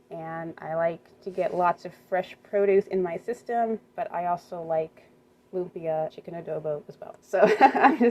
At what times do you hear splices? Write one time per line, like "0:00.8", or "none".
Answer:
0:03.9
0:06.1
0:07.2